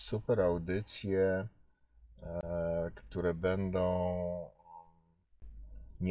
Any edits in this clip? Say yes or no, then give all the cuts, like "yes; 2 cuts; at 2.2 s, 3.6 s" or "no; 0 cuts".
no; 0 cuts